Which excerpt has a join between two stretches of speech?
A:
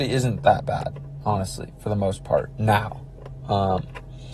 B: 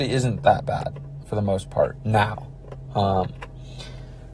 B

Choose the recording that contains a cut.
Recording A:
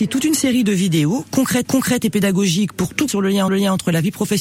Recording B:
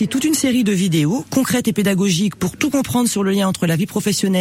A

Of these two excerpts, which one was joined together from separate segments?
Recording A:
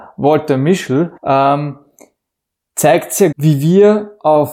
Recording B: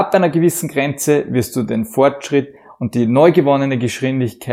A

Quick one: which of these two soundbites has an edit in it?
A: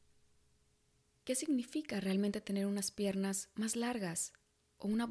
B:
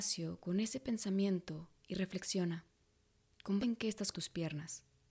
B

